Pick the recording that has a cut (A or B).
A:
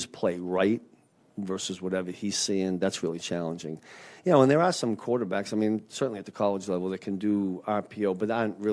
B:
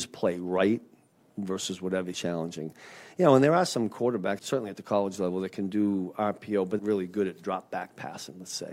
B